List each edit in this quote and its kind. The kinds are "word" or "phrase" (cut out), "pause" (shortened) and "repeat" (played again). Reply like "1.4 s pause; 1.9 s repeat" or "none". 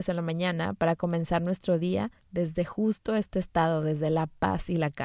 2.2 s pause